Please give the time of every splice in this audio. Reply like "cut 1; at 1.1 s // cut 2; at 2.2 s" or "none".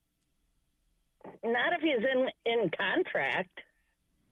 none